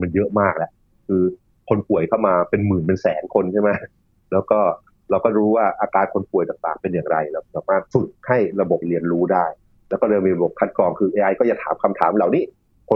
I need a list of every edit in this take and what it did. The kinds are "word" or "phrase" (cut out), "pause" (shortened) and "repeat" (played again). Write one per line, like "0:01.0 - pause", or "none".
0:07.9 - pause
0:08.8 - word